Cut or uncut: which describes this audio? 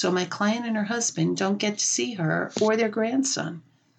uncut